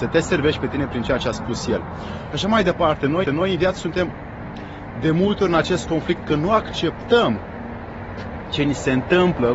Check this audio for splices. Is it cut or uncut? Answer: cut